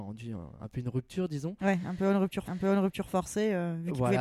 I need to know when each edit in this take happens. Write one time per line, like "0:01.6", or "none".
0:02.5

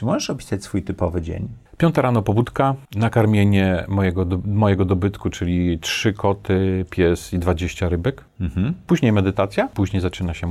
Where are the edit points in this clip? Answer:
0:01.7
0:02.8

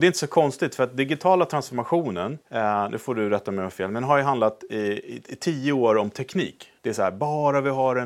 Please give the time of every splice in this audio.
0:02.4
0:06.8

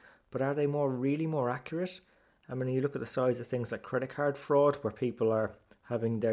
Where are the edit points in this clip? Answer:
none

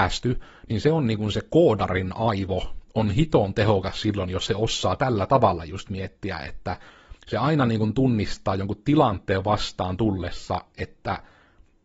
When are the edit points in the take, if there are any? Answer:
0:07.2

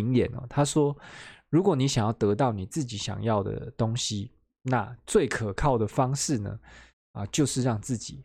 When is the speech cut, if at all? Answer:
none

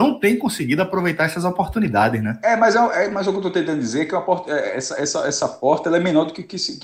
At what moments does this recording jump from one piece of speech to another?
none

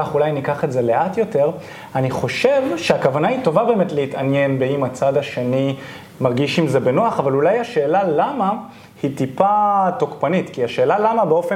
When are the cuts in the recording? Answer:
none

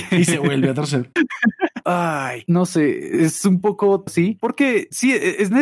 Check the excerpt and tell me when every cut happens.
0:01.8
0:04.1

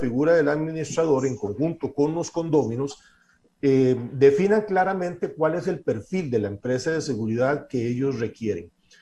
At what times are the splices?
none

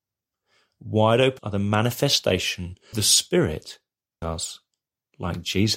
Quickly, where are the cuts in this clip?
0:01.4
0:02.9
0:04.2

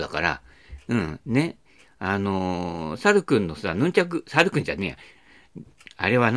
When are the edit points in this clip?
none

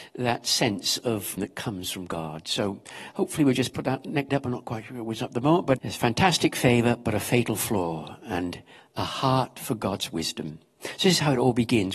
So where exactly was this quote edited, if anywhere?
0:01.4
0:04.3
0:05.8

